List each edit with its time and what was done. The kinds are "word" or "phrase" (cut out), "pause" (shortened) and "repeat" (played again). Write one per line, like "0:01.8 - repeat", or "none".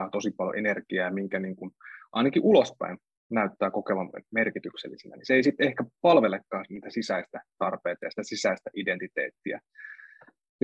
none